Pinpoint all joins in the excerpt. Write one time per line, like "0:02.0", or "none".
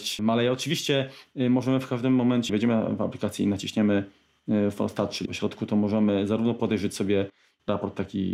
0:02.5
0:05.3